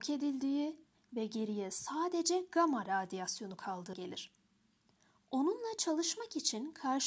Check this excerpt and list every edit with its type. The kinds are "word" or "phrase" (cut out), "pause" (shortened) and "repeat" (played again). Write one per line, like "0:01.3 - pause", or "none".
0:03.9 - word

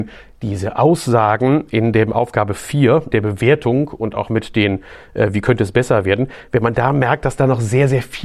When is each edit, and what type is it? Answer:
0:03.1 - word

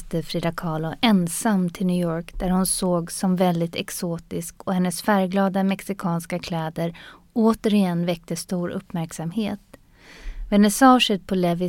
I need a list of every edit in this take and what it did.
none

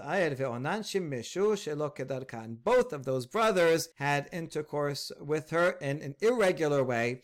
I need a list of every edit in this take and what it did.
0:03.9 - pause

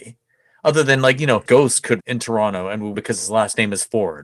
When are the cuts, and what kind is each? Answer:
0:01.5 - phrase
0:02.0 - word
0:02.9 - word

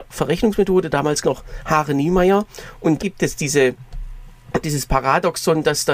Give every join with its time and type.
0:01.2 - word
0:03.0 - word
0:04.6 - word

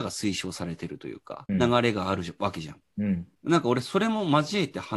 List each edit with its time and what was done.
0:01.5 - phrase
0:03.4 - pause

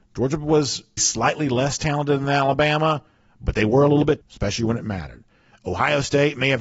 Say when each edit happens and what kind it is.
0:01.0 - word
0:04.2 - word

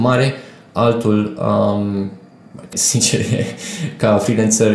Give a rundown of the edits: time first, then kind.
0:02.7 - word

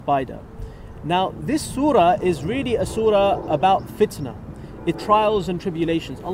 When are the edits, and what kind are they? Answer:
0:04.9 - word

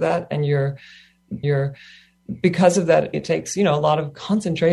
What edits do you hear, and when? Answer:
0:01.4 - repeat
0:03.1 - phrase

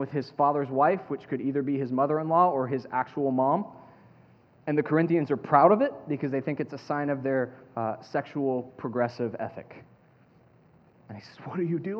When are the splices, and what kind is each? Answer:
none

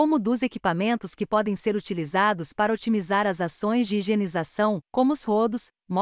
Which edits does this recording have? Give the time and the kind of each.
0:04.8 - pause

